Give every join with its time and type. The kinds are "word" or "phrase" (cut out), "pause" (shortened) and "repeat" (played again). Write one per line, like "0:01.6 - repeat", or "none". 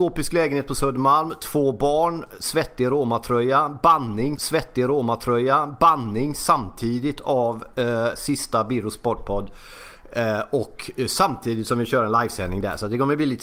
0:04.4 - repeat